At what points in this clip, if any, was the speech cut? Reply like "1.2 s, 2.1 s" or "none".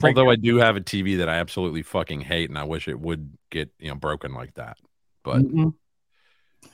none